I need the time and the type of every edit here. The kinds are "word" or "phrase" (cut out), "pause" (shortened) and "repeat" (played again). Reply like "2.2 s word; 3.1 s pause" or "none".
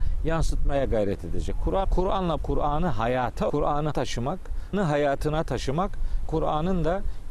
1.8 s word; 2.4 s word; 3.5 s word; 3.9 s word; 4.7 s word; 6.2 s word